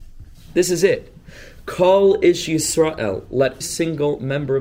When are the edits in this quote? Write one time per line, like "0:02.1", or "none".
0:03.6